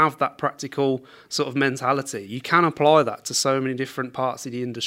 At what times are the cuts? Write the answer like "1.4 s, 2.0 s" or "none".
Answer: none